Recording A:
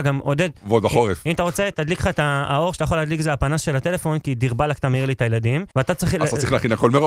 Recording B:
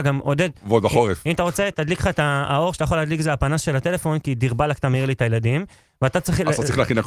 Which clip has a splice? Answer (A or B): A